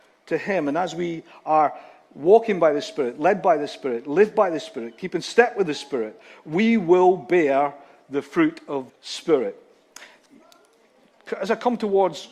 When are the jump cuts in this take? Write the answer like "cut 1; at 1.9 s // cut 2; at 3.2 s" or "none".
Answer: cut 1; at 8.9 s

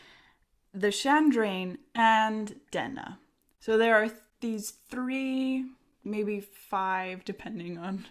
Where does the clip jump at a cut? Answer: none

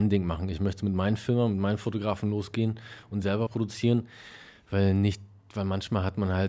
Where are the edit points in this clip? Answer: cut 1; at 3.5 s

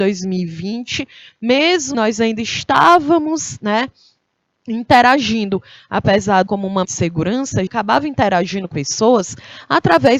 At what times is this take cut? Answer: cut 1; at 1.9 s // cut 2; at 6.5 s // cut 3; at 6.8 s // cut 4; at 7.7 s // cut 5; at 8.7 s

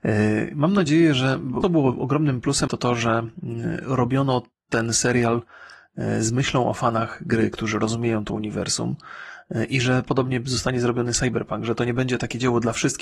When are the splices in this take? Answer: cut 1; at 1.6 s // cut 2; at 2.7 s

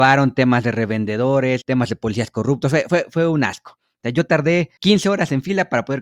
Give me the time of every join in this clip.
none

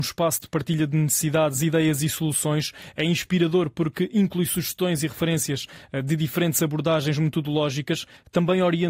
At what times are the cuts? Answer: none

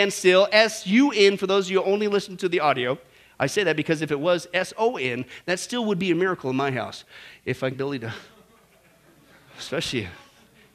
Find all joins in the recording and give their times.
cut 1; at 7.7 s

